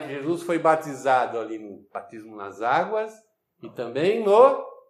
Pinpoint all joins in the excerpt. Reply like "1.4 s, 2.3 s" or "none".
none